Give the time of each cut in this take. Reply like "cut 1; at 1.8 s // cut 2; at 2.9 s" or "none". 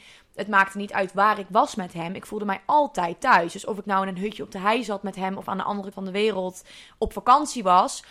cut 1; at 5.9 s